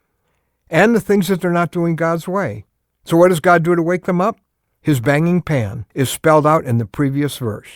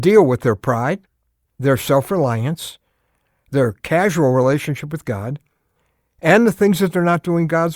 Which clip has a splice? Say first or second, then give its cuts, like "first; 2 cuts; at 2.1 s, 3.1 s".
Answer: first; 3 cuts; at 2.8 s, 4.5 s, 5.9 s